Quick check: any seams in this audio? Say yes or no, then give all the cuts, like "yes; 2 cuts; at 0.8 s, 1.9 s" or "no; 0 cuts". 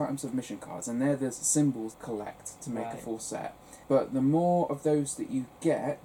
yes; 2 cuts; at 1.9 s, 3.8 s